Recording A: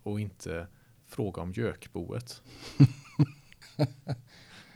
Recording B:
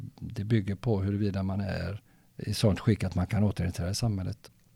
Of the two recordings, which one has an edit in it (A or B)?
B